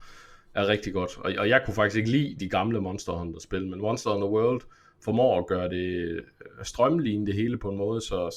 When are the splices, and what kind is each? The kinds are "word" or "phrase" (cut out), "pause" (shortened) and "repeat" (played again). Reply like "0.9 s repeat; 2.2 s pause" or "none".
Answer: none